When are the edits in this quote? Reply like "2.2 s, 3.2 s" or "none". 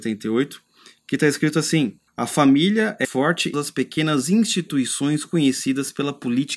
2.1 s, 3.0 s, 3.5 s